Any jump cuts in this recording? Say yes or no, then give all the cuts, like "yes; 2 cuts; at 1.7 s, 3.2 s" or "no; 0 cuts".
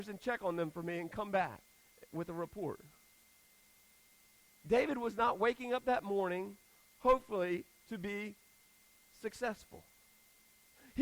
no; 0 cuts